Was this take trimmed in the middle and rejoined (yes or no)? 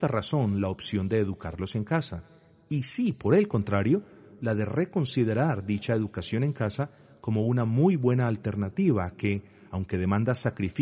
no